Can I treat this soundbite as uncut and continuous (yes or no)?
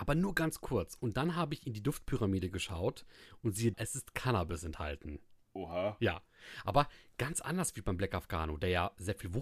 no